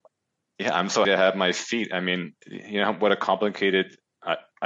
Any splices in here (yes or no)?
yes